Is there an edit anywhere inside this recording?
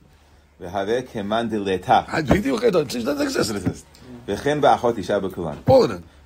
no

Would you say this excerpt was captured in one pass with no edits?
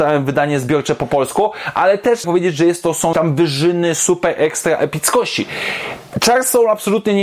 no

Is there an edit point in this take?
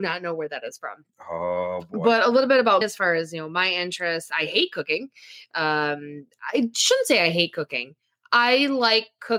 yes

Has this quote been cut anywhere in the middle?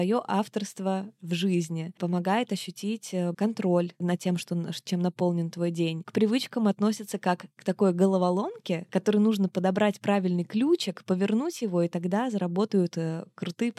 yes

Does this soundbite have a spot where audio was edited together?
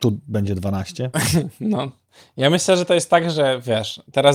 no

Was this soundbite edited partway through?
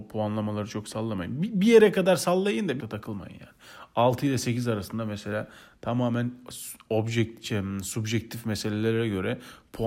yes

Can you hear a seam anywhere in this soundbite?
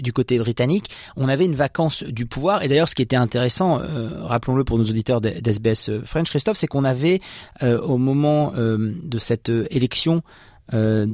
no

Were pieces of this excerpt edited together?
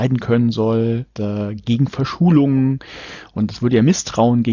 yes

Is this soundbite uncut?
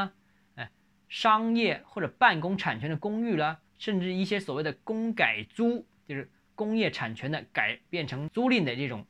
no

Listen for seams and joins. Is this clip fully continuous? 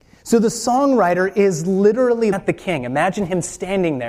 no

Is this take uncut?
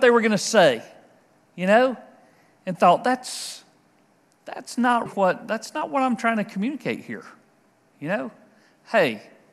no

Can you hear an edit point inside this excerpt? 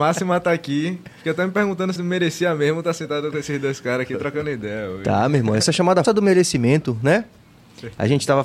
yes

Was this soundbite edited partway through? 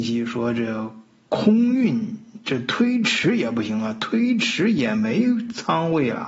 no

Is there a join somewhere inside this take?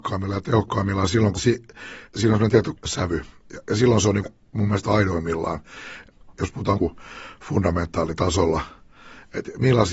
yes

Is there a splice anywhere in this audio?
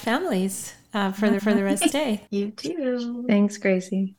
yes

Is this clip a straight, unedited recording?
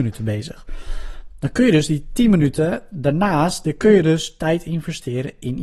yes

